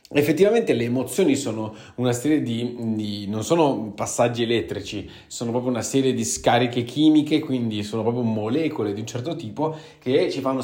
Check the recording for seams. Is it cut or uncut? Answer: uncut